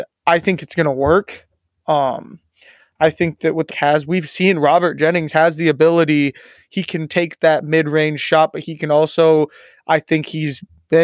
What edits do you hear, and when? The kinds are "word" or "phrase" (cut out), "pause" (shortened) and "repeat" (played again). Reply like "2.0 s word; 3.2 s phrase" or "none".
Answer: 3.7 s phrase